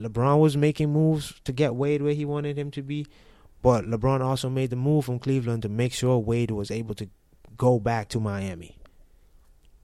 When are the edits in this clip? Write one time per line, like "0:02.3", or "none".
none